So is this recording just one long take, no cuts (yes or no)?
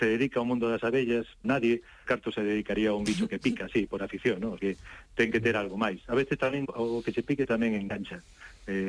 no